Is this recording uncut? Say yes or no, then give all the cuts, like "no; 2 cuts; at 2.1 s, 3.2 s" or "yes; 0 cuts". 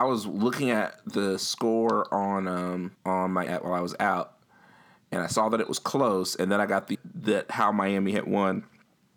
no; 3 cuts; at 2.9 s, 3.5 s, 6.9 s